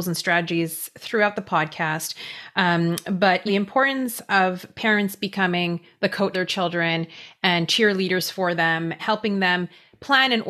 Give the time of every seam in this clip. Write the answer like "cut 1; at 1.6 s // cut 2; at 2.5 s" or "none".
cut 1; at 3.5 s // cut 2; at 6.3 s // cut 3; at 9.0 s